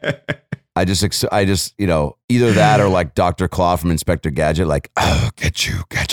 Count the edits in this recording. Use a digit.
1